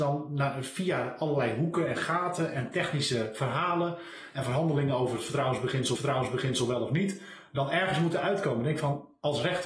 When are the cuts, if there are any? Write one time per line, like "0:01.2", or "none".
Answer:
0:06.0